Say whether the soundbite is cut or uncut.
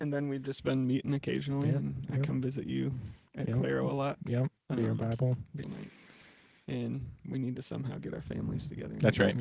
cut